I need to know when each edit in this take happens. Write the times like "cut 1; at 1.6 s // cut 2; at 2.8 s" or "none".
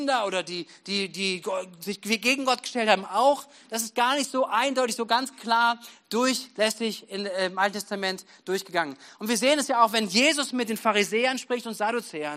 none